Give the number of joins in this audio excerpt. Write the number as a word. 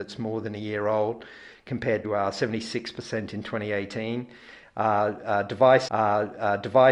two